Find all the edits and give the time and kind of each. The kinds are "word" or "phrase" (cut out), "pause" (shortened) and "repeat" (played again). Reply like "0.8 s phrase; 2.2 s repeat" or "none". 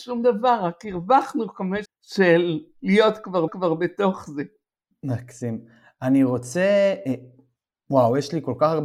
1.8 s word; 3.5 s repeat

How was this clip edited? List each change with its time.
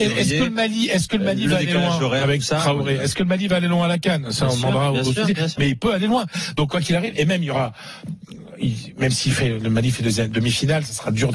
none

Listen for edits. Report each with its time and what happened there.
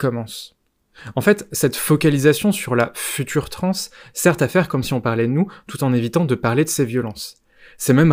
none

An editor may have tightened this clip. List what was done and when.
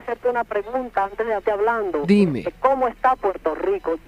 1.4 s word

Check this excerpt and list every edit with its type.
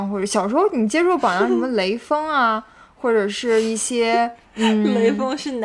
4.4 s pause

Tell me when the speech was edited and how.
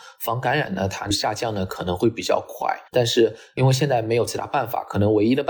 2.9 s pause

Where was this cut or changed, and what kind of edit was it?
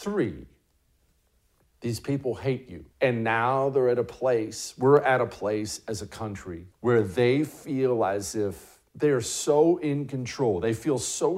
2.9 s pause; 6.7 s pause; 8.9 s pause

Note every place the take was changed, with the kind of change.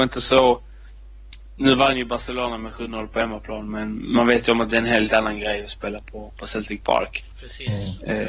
none

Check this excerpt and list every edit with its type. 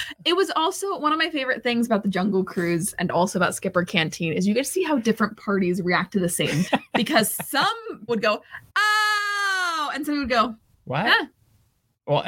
6.7 s word; 8.1 s word; 8.7 s pause

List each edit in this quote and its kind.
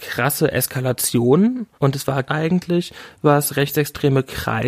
1.7 s pause; 2.3 s phrase

